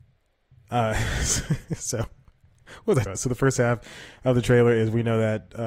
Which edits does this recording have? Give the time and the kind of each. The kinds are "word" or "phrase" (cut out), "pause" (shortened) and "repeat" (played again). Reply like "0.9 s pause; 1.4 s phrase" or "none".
3.1 s word